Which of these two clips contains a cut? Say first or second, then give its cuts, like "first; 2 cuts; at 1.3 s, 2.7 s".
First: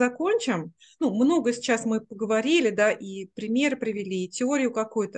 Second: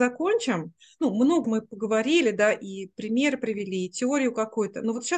second; 1 cut; at 1.4 s